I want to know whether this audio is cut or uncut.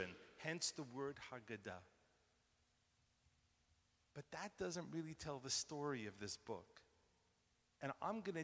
uncut